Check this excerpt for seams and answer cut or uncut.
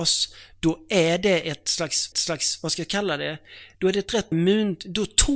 cut